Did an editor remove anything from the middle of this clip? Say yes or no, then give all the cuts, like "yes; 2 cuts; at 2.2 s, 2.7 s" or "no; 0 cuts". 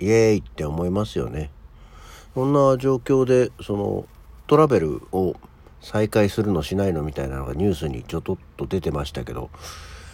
yes; 2 cuts; at 4.5 s, 5.1 s